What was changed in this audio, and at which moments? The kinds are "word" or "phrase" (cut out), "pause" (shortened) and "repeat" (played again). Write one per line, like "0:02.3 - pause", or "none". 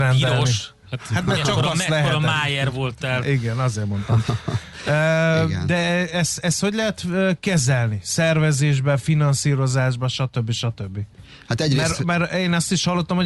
none